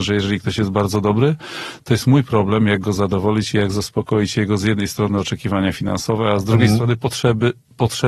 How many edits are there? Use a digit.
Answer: 0